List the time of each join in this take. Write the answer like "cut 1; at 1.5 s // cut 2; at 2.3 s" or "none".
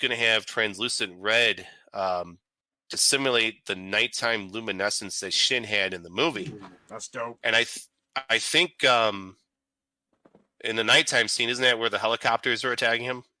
none